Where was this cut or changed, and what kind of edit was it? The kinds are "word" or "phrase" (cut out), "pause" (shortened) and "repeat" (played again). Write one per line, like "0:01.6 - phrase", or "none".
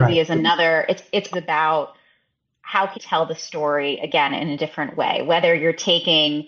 0:01.3 - word
0:02.9 - word